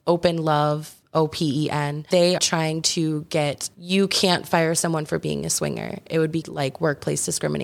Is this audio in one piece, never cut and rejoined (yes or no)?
no